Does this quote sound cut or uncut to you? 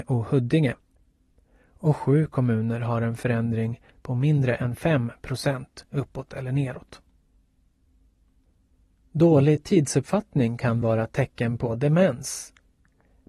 uncut